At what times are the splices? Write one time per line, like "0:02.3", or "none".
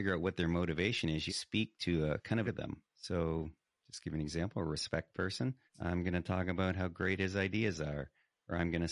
0:01.3
0:02.4
0:02.9
0:05.1
0:05.7